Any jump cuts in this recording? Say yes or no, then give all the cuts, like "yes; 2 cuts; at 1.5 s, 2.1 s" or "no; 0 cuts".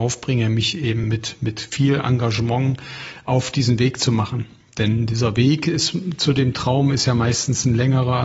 no; 0 cuts